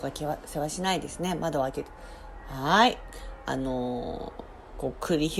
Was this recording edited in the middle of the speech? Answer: no; 0 cuts

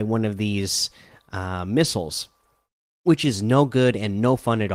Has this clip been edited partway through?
no; 0 cuts

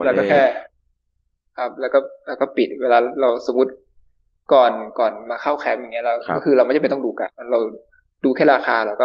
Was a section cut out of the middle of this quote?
no; 0 cuts

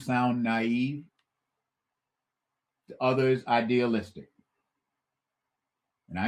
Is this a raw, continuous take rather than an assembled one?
yes; 0 cuts

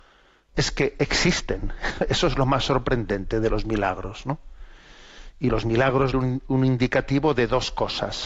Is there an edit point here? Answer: yes; 1 cut; at 6.1 s

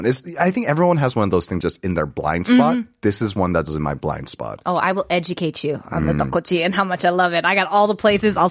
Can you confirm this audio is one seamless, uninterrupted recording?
no; 1 cut; at 1.6 s

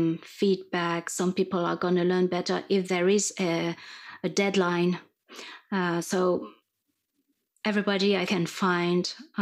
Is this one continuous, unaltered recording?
no; 2 cuts; at 2.8 s, 8.3 s

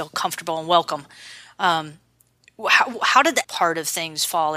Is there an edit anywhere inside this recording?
yes; 1 cut; at 3.4 s

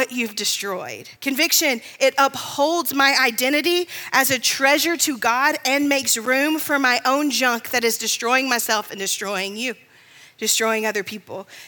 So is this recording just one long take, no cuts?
no; 1 cut; at 1.2 s

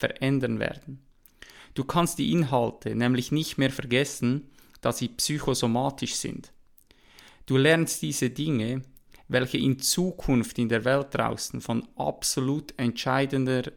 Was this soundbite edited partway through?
no; 0 cuts

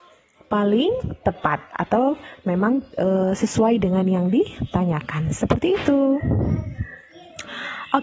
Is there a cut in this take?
yes; 1 cut; at 2.9 s

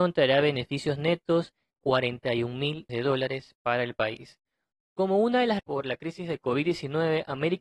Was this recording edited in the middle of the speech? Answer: yes; 3 cuts; at 1.7 s, 2.9 s, 5.6 s

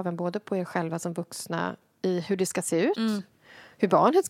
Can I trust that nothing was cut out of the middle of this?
yes; 0 cuts

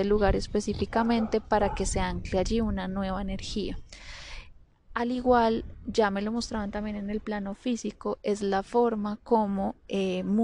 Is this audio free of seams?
yes; 0 cuts

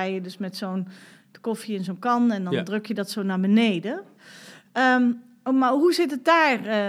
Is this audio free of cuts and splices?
yes; 0 cuts

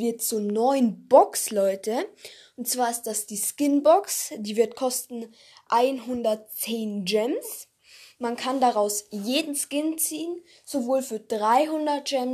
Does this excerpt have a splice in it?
no; 0 cuts

